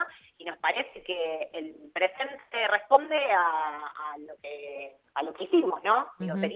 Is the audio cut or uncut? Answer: uncut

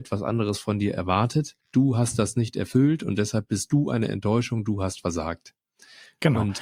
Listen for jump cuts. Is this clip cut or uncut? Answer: cut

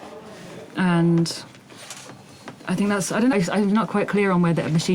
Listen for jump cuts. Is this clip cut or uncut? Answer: cut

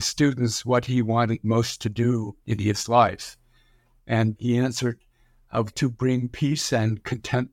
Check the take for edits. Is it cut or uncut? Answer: cut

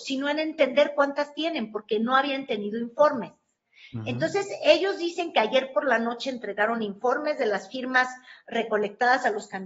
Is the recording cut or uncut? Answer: uncut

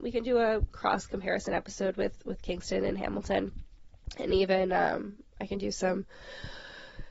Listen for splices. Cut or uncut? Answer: uncut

